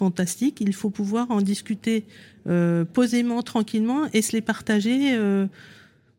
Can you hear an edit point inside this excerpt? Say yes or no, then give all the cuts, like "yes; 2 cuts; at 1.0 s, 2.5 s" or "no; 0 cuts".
no; 0 cuts